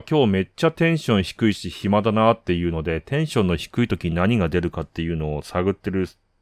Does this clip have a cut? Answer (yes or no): no